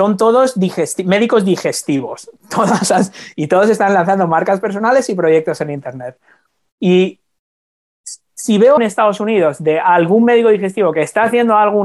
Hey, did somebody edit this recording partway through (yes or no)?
yes